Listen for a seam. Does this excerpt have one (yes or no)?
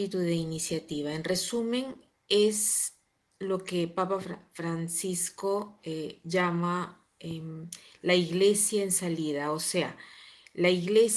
no